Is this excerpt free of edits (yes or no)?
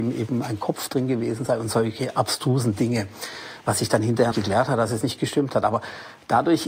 no